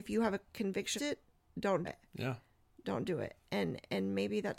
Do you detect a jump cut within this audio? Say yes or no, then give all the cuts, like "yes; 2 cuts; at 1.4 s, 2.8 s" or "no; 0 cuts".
yes; 2 cuts; at 1.0 s, 1.8 s